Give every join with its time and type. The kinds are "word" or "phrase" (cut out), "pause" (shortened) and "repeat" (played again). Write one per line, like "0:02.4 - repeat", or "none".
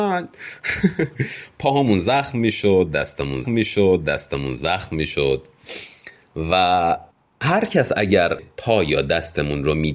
0:03.4 - repeat
0:07.1 - pause
0:08.4 - word